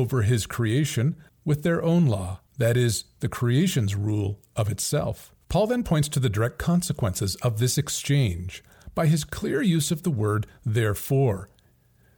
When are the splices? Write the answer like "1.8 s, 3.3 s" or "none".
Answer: 1.3 s, 2.5 s, 5.4 s